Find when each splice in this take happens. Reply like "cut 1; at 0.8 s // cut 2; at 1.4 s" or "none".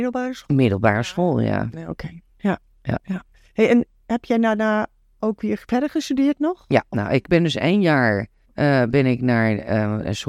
cut 1; at 2.3 s // cut 2; at 8.4 s